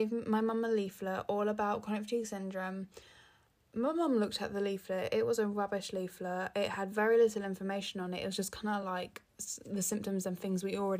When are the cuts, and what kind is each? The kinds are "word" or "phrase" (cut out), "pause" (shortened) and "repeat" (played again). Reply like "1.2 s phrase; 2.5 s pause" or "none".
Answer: none